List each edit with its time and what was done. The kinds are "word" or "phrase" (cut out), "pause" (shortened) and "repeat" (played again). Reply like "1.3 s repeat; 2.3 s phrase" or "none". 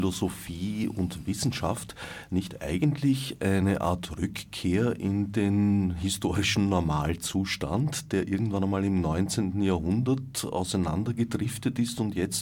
none